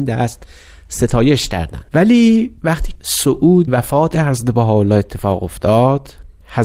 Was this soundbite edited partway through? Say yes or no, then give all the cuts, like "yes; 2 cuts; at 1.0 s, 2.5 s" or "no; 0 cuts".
yes; 3 cuts; at 1.9 s, 2.9 s, 3.7 s